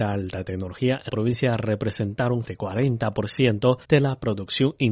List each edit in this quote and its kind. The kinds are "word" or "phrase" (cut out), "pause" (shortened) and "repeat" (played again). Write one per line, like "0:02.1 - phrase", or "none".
0:01.1 - word
0:02.4 - word
0:03.8 - pause